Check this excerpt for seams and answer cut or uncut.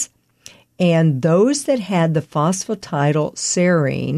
uncut